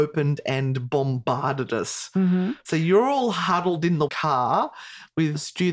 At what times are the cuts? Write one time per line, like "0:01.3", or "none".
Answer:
0:04.1

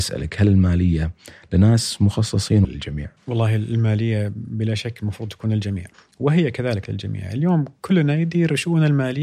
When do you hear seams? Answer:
0:02.6
0:03.2
0:05.9

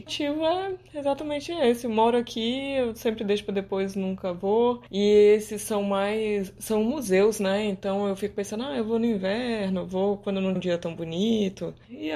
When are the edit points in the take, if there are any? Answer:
0:10.6

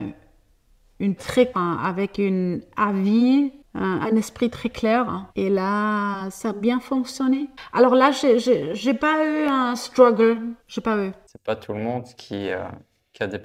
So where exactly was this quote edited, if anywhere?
0:01.2
0:01.5
0:05.3
0:10.6

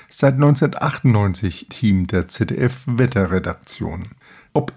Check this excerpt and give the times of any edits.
0:01.7

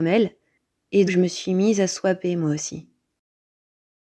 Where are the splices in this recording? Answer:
0:01.1

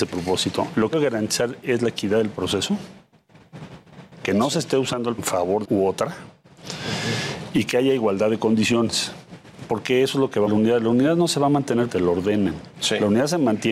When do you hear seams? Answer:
0:00.9
0:05.2
0:05.6
0:10.5
0:11.9
0:12.7

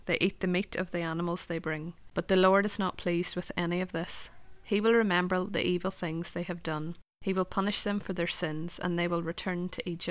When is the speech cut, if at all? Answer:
0:02.1
0:07.1

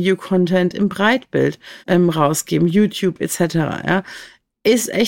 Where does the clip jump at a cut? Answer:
0:01.8

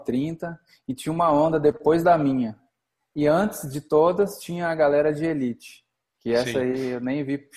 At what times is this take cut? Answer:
none

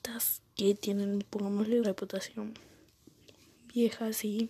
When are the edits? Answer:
0:01.8

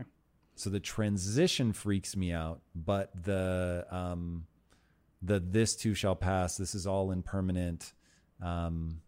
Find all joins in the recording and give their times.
none

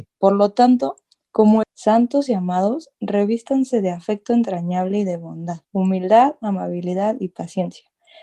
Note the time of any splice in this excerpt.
0:01.6
0:05.6

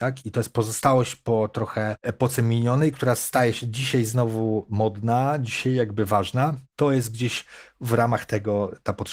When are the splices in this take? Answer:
none

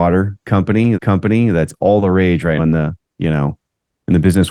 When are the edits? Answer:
0:00.9
0:02.6

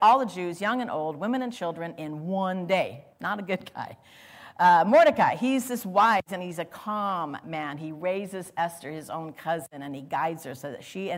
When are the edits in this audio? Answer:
0:03.1

